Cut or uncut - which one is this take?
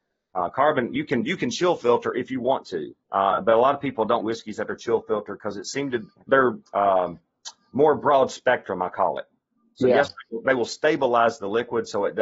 cut